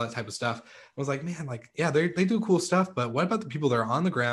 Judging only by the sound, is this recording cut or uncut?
uncut